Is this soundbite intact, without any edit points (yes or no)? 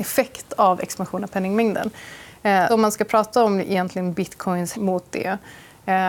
no